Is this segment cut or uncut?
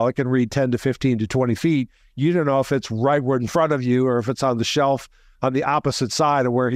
uncut